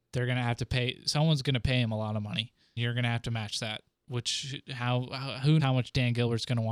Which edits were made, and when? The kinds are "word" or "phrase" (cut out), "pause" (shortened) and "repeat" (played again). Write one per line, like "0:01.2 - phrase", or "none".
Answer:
0:02.8 - word
0:05.6 - word